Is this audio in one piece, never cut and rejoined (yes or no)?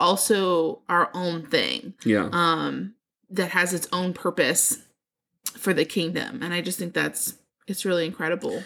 yes